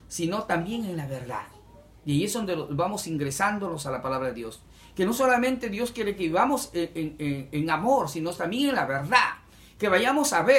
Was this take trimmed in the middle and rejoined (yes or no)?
no